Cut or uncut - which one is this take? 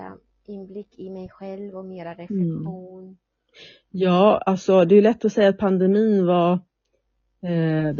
uncut